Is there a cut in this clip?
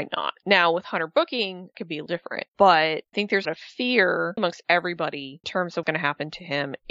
yes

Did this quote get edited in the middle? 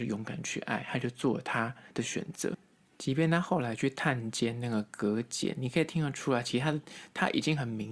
no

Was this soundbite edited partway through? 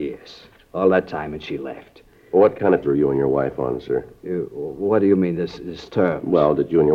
yes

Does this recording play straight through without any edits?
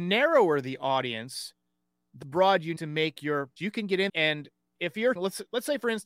no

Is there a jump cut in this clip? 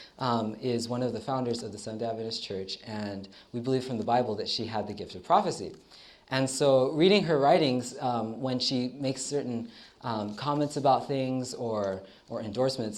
no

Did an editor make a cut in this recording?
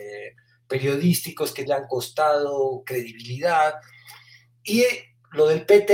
yes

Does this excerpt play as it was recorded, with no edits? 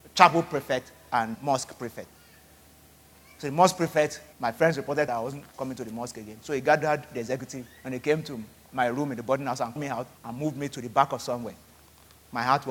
no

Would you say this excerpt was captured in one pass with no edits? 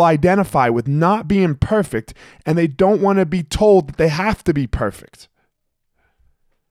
yes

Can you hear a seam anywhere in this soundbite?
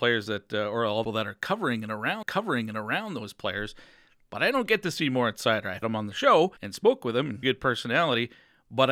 yes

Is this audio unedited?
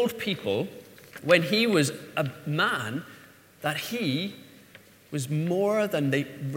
yes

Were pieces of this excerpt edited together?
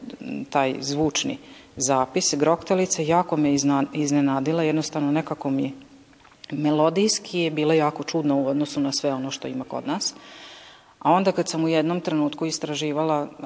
no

